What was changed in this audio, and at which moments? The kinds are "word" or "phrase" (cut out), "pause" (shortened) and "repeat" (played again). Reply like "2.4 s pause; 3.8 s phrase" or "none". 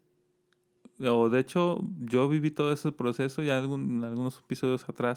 none